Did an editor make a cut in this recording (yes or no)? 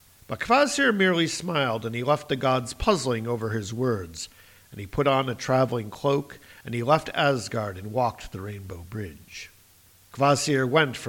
no